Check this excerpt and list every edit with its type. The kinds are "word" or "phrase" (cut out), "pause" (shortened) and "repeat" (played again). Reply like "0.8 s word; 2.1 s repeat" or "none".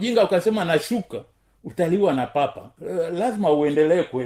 none